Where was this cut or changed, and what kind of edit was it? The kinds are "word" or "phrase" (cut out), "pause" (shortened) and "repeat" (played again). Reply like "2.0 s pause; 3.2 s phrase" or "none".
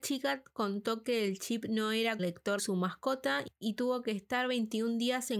2.2 s phrase; 2.6 s word